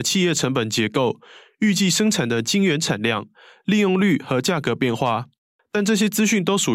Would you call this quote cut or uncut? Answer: uncut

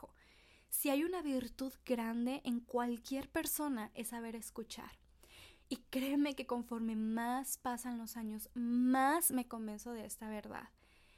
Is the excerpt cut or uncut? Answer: uncut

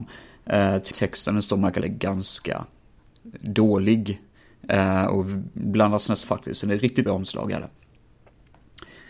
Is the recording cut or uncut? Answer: cut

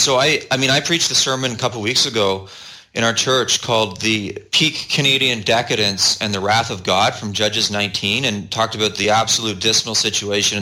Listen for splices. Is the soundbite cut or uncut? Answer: uncut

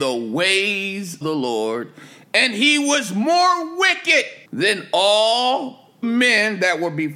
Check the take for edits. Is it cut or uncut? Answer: cut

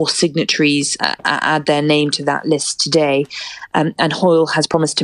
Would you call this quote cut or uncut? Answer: cut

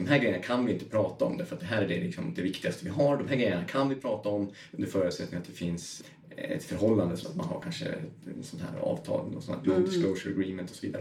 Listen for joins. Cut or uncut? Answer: cut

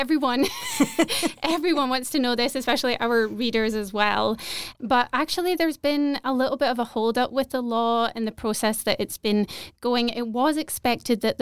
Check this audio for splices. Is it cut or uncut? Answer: uncut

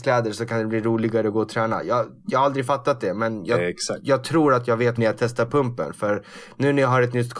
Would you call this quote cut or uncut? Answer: cut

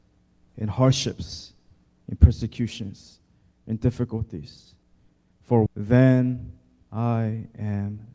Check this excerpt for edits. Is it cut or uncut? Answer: cut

